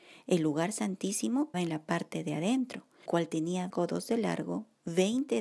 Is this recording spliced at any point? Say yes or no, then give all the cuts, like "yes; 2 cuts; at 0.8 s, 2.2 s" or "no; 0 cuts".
yes; 3 cuts; at 1.5 s, 3.1 s, 3.7 s